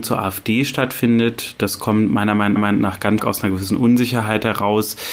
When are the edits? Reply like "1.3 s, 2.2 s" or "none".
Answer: 2.6 s, 3.2 s